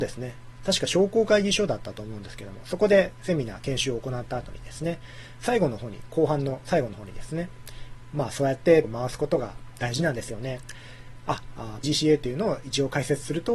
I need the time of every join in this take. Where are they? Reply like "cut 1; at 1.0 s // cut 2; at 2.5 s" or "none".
cut 1; at 8.8 s // cut 2; at 11.8 s